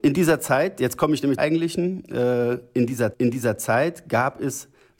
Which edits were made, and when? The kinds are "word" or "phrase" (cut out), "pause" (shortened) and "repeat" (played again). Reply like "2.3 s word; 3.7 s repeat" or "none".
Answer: 1.4 s phrase; 3.1 s repeat